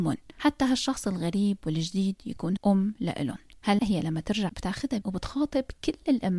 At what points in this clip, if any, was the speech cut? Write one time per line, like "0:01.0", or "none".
0:02.6
0:03.8
0:04.5
0:05.0